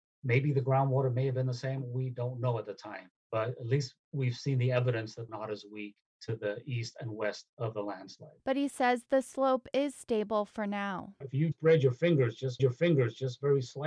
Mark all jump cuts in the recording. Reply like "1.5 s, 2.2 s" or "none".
3.2 s, 5.3 s, 8.4 s, 11.5 s, 12.6 s